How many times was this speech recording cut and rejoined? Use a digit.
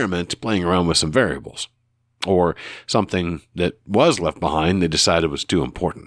0